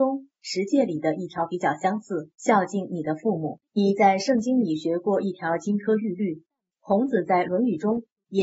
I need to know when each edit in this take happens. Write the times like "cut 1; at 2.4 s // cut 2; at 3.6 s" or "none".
cut 1; at 2.3 s // cut 2; at 3.7 s